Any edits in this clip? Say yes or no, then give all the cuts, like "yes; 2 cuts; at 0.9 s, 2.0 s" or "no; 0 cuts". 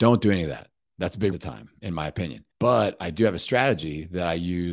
yes; 2 cuts; at 1.3 s, 2.5 s